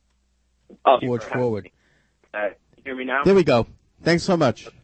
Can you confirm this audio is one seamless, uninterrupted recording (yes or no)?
no